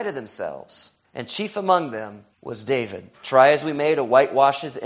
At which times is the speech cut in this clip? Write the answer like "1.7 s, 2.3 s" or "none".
1.0 s, 2.3 s, 3.1 s